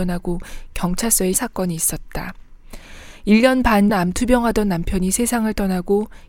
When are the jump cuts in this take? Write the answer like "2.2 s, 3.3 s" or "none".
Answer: 1.3 s, 3.9 s